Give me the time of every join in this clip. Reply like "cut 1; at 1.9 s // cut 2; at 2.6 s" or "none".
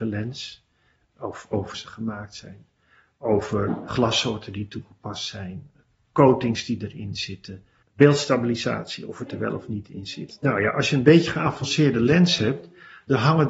cut 1; at 1.7 s // cut 2; at 3.9 s // cut 3; at 7.8 s